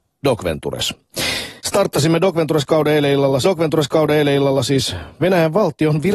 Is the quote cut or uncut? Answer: cut